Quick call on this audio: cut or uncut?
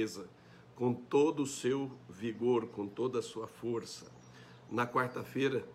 uncut